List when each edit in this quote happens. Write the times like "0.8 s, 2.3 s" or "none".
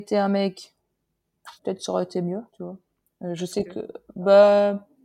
1.6 s, 2.5 s, 3.0 s